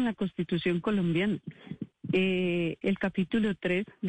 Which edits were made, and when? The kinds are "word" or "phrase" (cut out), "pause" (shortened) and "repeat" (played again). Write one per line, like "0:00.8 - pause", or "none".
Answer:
0:02.8 - word